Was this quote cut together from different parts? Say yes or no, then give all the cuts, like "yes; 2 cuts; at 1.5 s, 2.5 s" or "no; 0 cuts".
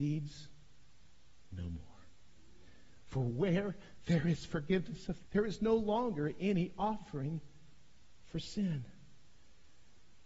yes; 1 cut; at 5.2 s